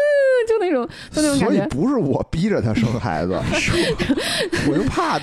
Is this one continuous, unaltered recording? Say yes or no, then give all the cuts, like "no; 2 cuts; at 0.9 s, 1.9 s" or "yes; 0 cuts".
no; 1 cut; at 3.5 s